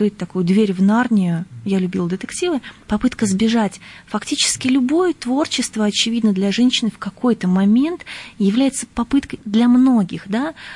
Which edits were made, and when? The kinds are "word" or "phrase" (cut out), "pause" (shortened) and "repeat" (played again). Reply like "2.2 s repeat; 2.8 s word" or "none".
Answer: 2.8 s pause; 9.4 s word

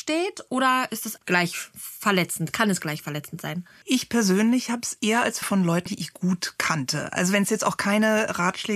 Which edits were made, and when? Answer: 1.2 s word; 3.8 s pause; 5.4 s phrase; 5.9 s word

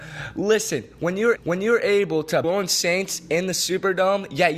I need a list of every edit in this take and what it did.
1.4 s repeat; 2.4 s phrase

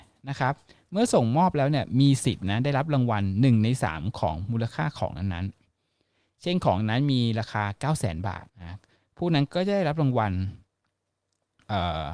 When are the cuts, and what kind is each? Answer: 8.5 s pause

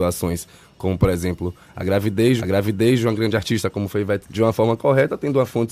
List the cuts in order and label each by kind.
2.4 s repeat; 4.2 s word

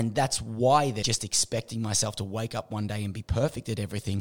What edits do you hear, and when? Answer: 1.0 s phrase

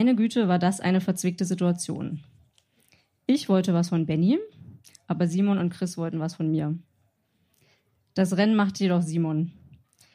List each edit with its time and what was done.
none

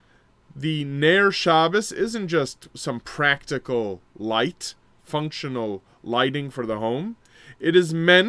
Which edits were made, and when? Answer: none

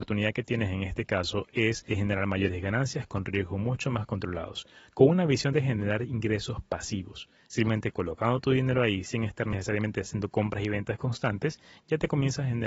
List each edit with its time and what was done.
none

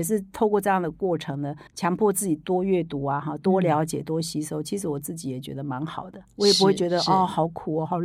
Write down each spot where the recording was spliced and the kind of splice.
1.7 s pause

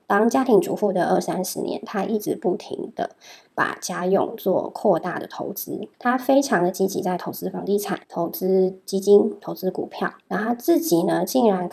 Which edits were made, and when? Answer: 5.9 s pause; 8.0 s pause; 10.2 s pause

